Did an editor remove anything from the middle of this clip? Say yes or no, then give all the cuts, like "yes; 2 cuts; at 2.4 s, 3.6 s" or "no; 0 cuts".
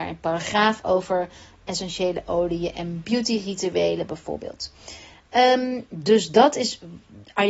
no; 0 cuts